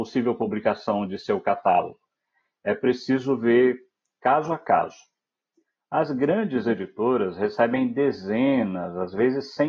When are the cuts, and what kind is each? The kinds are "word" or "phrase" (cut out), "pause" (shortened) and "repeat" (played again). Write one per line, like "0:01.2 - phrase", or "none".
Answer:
none